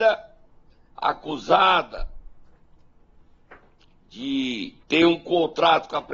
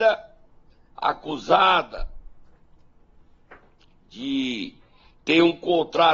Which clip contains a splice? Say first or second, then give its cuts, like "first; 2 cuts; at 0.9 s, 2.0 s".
first; 1 cut; at 4.8 s